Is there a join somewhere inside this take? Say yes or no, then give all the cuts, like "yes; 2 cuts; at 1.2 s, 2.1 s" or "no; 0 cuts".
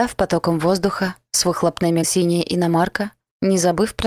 yes; 1 cut; at 2.0 s